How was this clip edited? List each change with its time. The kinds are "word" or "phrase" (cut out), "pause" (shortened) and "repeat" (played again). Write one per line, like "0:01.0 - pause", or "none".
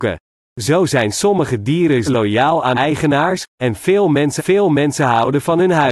0:02.1 - word
0:02.7 - word
0:04.4 - repeat